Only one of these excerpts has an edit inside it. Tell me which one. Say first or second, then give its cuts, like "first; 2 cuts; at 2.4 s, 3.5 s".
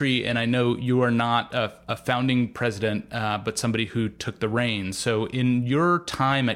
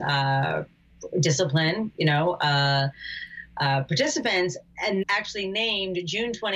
second; 1 cut; at 5.0 s